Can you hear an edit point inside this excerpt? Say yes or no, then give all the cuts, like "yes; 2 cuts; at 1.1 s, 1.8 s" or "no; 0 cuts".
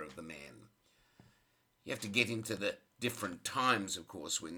no; 0 cuts